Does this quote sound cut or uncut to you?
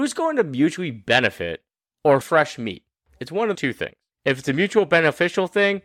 cut